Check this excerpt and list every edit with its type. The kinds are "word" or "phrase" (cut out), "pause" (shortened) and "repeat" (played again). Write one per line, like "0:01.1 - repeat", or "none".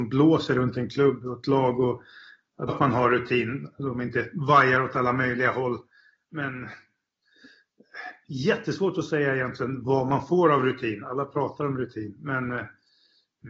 0:02.7 - word